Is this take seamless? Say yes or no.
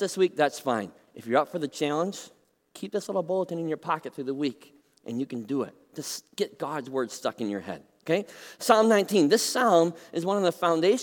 yes